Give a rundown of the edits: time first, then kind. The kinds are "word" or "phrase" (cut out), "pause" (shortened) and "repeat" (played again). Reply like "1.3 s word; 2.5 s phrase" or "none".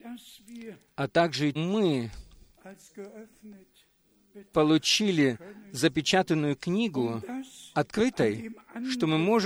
1.6 s phrase